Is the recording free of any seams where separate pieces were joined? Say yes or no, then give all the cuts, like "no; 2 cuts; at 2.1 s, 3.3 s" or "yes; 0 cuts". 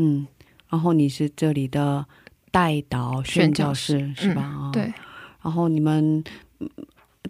yes; 0 cuts